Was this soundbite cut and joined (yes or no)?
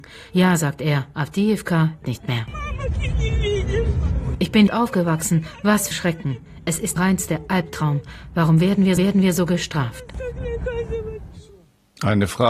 yes